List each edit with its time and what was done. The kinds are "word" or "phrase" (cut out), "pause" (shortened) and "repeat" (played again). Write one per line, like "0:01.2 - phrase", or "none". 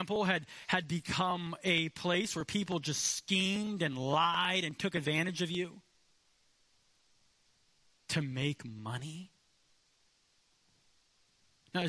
none